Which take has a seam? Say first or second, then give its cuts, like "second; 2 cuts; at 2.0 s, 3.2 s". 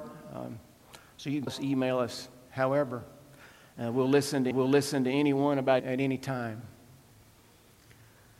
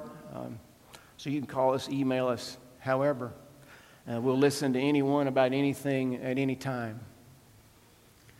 first; 3 cuts; at 1.5 s, 4.5 s, 5.8 s